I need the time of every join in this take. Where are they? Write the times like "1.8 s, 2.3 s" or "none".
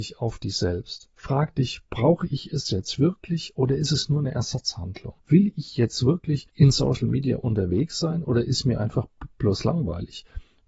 1.1 s, 1.9 s, 5.2 s